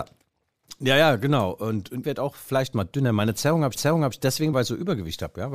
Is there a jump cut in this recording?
yes; 4 cuts; at 2.0 s, 2.7 s, 3.7 s, 4.5 s

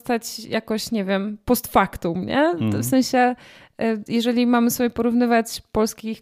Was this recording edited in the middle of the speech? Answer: no; 0 cuts

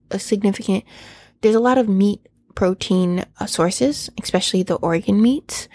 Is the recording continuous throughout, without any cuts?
yes; 0 cuts

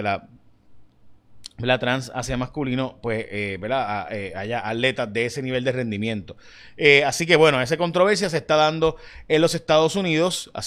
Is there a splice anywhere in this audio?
no; 0 cuts

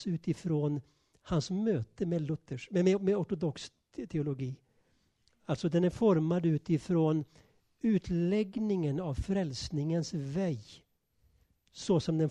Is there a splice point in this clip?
no; 0 cuts

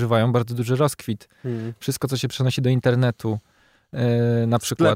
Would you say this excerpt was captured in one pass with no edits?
yes; 0 cuts

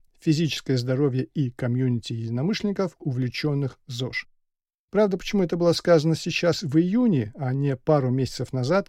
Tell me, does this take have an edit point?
no; 0 cuts

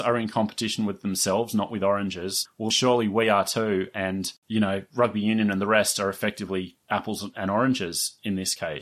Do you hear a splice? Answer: yes; 1 cut; at 2.7 s

